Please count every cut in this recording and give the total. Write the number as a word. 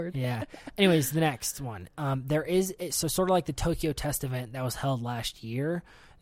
zero